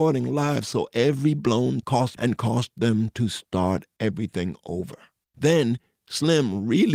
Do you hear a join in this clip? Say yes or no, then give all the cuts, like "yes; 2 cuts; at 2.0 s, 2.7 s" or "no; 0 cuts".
yes; 2 cuts; at 1.8 s, 2.2 s